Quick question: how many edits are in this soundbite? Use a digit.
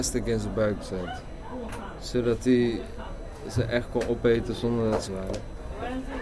1